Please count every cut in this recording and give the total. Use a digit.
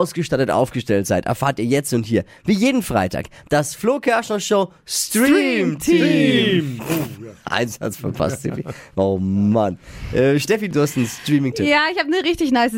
0